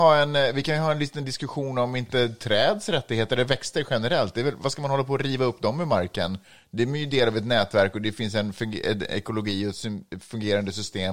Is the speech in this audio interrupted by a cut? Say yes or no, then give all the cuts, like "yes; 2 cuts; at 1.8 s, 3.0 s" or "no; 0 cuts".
no; 0 cuts